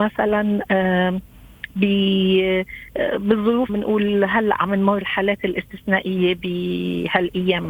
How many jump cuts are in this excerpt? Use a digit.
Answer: 2